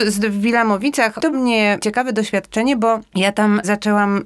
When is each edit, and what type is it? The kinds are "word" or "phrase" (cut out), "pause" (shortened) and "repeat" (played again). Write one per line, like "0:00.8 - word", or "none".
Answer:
0:01.3 - phrase